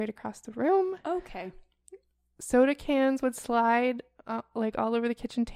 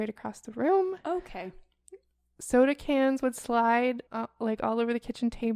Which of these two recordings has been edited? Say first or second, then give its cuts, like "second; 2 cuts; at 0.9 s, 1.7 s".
second; 1 cut; at 4.1 s